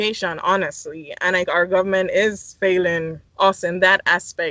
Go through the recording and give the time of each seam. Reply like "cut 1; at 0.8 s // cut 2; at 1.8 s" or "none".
cut 1; at 1.5 s // cut 2; at 3.3 s